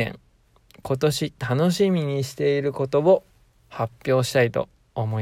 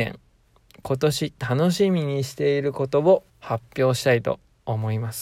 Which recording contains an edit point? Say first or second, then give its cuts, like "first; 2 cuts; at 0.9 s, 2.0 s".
second; 1 cut; at 3.3 s